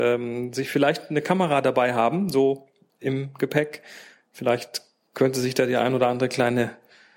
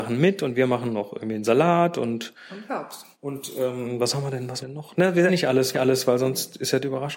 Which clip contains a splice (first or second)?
second